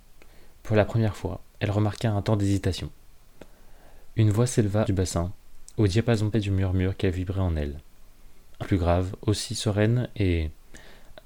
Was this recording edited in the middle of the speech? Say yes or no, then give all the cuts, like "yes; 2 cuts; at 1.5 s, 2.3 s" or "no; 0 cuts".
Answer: yes; 3 cuts; at 4.8 s, 6.3 s, 8.6 s